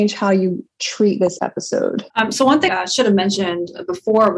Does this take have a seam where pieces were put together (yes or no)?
yes